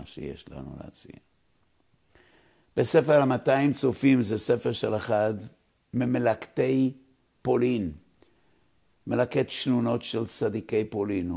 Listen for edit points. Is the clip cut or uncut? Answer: cut